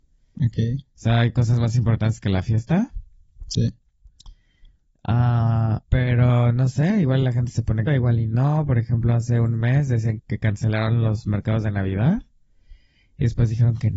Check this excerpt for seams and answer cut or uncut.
cut